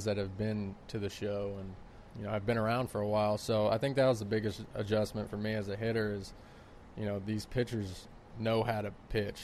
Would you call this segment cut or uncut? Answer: cut